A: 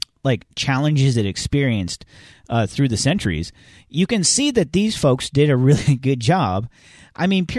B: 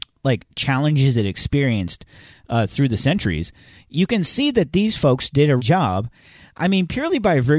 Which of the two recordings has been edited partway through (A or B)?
B